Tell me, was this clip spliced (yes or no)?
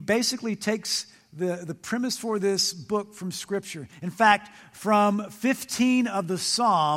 no